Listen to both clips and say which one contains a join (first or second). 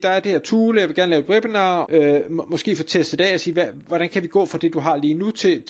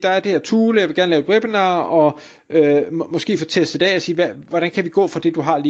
first